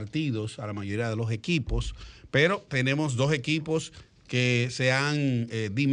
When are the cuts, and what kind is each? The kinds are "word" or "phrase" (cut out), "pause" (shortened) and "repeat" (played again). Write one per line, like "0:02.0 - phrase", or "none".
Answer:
none